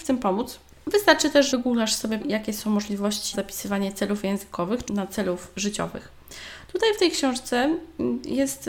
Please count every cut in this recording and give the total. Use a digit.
4